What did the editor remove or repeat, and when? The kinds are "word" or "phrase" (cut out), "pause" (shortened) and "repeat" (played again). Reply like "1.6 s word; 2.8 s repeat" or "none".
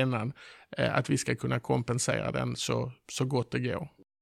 none